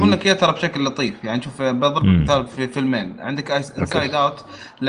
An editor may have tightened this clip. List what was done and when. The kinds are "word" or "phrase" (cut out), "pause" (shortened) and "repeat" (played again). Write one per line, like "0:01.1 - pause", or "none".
none